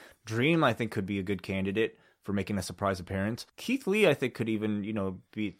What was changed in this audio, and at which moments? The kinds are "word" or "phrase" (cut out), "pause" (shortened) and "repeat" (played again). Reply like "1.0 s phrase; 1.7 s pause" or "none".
3.5 s pause